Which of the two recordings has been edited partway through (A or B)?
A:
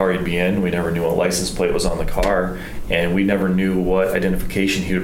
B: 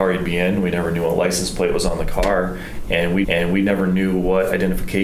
B